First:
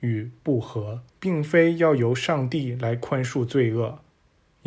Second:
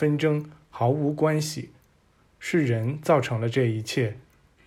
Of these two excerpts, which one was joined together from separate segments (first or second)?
first